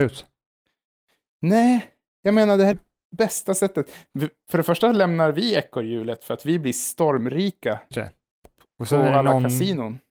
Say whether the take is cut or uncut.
cut